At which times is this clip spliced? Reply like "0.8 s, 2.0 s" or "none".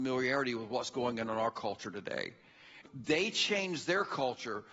2.9 s